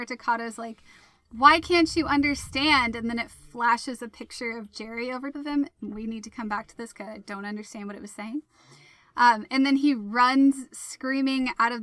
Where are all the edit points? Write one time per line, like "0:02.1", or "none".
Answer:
0:05.3